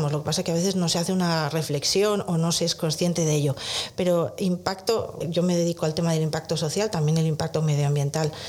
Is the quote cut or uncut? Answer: cut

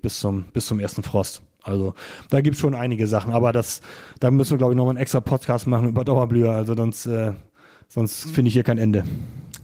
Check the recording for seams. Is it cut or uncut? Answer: uncut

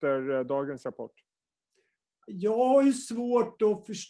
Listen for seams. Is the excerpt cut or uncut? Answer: uncut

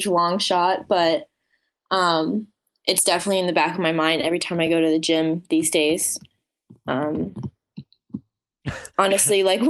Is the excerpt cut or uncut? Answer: uncut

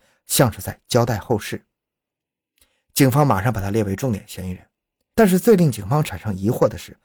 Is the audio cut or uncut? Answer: uncut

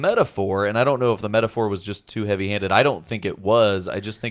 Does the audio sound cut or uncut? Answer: uncut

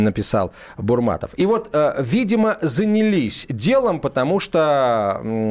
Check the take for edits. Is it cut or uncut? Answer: uncut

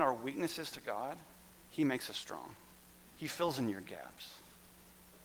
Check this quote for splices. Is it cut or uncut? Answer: uncut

